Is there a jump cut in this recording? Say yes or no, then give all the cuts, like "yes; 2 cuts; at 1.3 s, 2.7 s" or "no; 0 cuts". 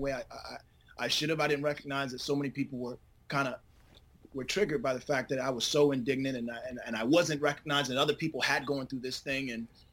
no; 0 cuts